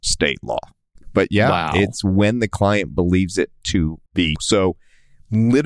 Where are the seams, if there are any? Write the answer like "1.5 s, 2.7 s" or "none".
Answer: 4.1 s